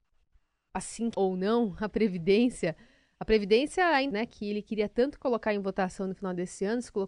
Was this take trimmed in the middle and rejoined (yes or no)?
yes